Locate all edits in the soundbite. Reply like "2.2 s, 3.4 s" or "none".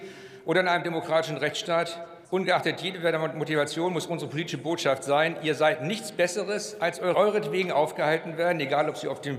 2.2 s, 7.1 s